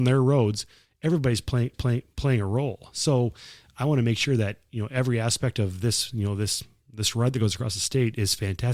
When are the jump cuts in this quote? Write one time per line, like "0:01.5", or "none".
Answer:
0:01.7